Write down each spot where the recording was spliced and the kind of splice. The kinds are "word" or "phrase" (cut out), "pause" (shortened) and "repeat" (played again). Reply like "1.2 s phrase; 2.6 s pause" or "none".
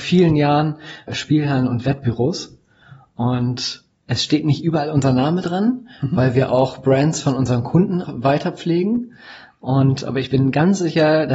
1.1 s word; 3.9 s pause; 8.0 s word